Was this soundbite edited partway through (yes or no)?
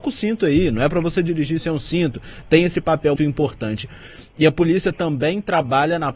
yes